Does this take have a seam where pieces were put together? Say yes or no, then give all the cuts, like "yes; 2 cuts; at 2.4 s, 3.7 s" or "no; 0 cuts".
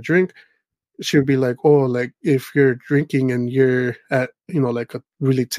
no; 0 cuts